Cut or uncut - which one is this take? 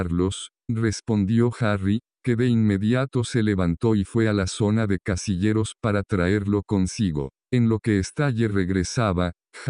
uncut